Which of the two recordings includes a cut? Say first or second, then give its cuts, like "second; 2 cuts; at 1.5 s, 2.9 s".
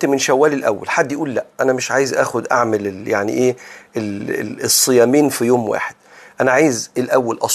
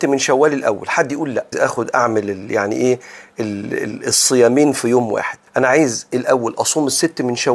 second; 2 cuts; at 1.5 s, 5.5 s